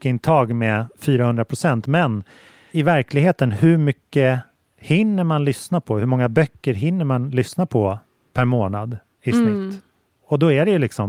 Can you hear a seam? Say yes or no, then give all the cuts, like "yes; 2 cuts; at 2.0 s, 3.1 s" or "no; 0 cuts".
no; 0 cuts